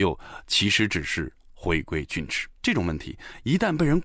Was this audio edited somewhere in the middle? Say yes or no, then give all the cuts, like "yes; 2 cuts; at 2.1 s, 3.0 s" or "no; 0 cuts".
yes; 1 cut; at 2.5 s